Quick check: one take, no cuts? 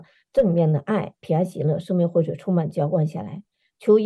yes; 0 cuts

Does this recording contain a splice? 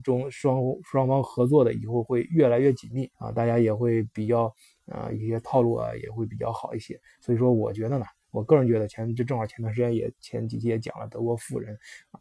yes; 1 cut; at 3.1 s

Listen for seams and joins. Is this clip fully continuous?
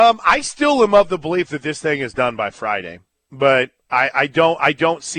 yes; 0 cuts

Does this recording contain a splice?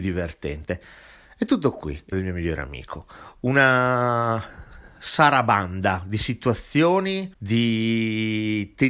yes; 1 cut; at 2.1 s

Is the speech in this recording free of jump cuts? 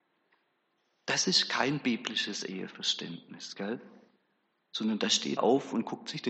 no; 1 cut; at 5.4 s

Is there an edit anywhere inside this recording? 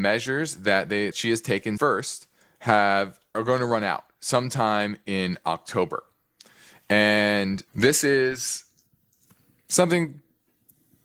yes; 4 cuts; at 1.1 s, 1.8 s, 3.3 s, 7.7 s

